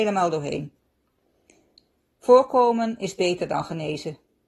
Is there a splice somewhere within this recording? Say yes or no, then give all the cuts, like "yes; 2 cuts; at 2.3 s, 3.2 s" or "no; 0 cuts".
no; 0 cuts